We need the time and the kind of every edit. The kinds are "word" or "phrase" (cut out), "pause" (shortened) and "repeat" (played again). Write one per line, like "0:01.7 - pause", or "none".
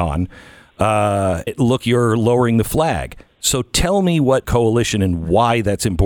0:01.5 - word
0:01.8 - word
0:04.4 - phrase